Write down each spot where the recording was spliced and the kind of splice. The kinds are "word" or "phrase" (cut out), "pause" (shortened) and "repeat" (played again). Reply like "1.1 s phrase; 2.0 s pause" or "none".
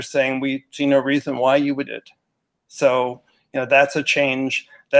1.9 s word